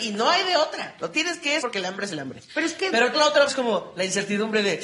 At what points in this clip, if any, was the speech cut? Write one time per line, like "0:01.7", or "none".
0:01.1
0:01.6
0:03.1
0:03.5